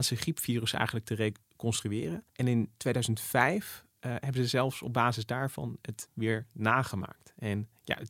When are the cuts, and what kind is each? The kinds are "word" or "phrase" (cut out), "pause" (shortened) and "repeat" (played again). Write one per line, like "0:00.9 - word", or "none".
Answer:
0:02.3 - pause
0:06.1 - word